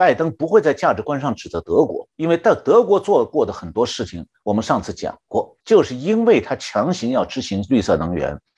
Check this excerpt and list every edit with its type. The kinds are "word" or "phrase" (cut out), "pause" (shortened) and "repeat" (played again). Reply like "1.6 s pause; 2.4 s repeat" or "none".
2.1 s pause; 5.6 s pause